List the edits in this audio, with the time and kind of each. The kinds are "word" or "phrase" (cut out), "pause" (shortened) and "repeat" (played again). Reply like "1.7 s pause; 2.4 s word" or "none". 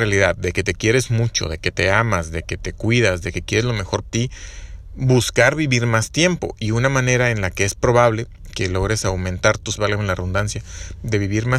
4.1 s word; 9.8 s word